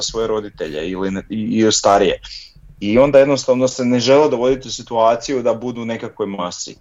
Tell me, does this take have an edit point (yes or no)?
no